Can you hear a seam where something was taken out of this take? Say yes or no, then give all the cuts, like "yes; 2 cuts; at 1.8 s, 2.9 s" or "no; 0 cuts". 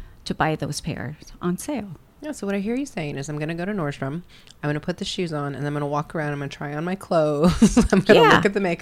no; 0 cuts